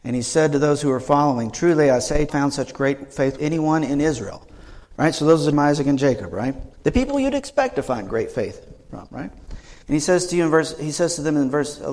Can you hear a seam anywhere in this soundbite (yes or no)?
yes